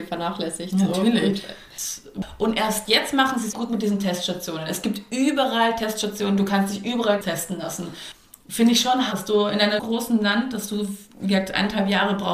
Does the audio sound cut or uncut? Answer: cut